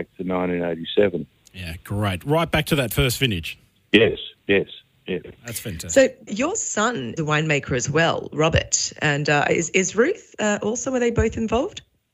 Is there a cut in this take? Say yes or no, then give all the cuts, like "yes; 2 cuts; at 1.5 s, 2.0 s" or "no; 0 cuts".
yes; 3 cuts; at 5.4 s, 6.3 s, 7.2 s